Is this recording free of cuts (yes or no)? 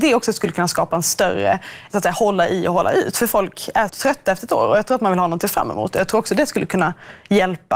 no